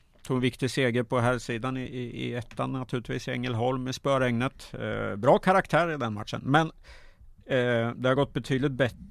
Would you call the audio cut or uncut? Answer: uncut